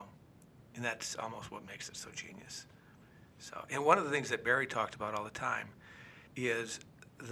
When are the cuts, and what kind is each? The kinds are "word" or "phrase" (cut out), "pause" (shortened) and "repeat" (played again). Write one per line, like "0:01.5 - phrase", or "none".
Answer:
0:06.3 - pause